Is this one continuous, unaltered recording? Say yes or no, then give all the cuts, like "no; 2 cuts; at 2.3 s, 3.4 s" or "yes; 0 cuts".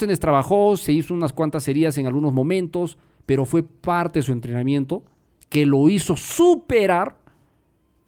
yes; 0 cuts